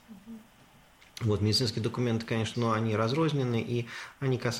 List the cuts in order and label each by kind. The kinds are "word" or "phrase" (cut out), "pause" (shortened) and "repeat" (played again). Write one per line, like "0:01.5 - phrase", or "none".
0:02.5 - word